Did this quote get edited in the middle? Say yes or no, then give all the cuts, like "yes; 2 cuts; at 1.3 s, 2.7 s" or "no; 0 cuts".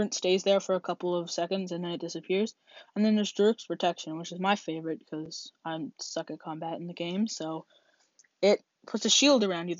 no; 0 cuts